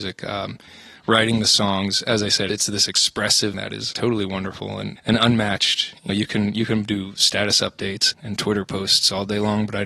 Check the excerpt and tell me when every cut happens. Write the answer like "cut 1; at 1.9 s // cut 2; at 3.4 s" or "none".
cut 1; at 2.5 s // cut 2; at 3.5 s // cut 3; at 3.9 s // cut 4; at 5.0 s // cut 5; at 6.1 s // cut 6; at 8.1 s